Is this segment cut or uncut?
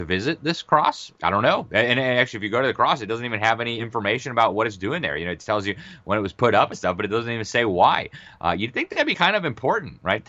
cut